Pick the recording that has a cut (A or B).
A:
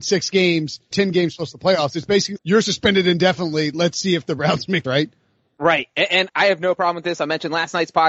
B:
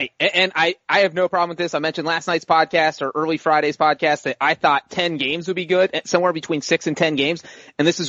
A